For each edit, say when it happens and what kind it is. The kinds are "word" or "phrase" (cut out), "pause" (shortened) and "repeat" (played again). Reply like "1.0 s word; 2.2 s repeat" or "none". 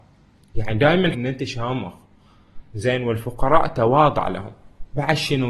1.1 s word